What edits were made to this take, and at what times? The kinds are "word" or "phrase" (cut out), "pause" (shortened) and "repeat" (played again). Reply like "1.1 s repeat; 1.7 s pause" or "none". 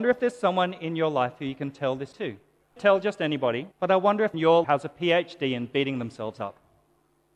2.1 s word; 2.8 s phrase; 3.7 s pause; 4.3 s phrase; 4.6 s phrase